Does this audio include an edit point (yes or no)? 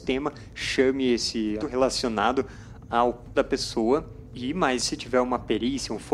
yes